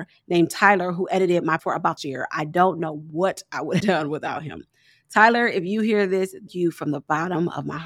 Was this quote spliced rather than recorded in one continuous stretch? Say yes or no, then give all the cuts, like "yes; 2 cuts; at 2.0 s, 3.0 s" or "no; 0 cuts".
yes; 4 cuts; at 1.6 s, 2.0 s, 3.8 s, 6.5 s